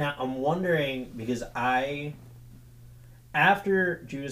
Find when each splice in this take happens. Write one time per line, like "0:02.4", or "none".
none